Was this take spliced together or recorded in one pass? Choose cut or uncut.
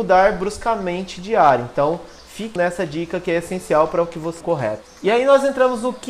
cut